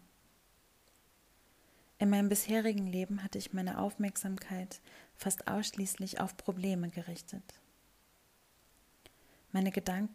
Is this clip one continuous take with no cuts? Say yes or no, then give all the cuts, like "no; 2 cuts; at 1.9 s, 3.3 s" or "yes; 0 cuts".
yes; 0 cuts